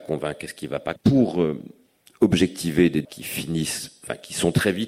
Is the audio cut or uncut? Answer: cut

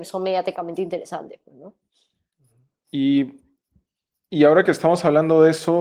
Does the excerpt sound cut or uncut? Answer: uncut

